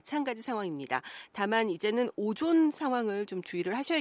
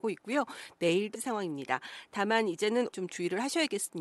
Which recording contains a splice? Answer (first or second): second